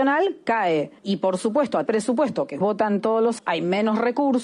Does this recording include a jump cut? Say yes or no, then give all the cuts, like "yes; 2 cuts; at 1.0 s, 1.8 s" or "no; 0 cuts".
yes; 4 cuts; at 1.0 s, 1.9 s, 2.6 s, 3.4 s